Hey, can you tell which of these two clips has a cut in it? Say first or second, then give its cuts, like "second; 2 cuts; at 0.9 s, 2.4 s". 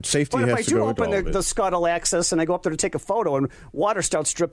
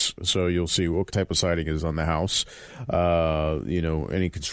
second; 1 cut; at 1.1 s